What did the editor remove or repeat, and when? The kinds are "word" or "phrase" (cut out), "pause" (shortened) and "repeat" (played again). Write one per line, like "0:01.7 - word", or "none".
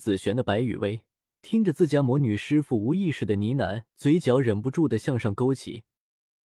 0:01.2 - pause
0:03.9 - pause